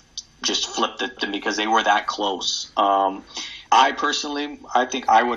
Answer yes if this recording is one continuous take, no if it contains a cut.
no